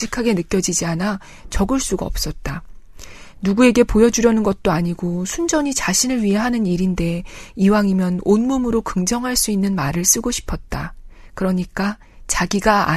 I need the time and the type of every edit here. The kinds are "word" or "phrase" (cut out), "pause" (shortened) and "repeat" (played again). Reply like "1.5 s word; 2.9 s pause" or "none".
none